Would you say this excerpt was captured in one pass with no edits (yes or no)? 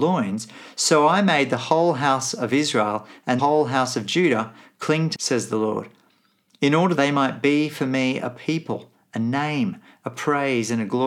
no